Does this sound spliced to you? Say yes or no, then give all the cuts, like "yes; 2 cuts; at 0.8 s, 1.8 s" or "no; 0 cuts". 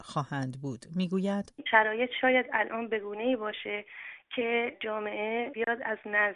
no; 0 cuts